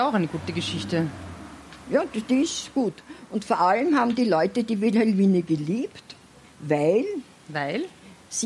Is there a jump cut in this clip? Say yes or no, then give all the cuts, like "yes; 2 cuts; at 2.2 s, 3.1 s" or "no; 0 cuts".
yes; 1 cut; at 6.4 s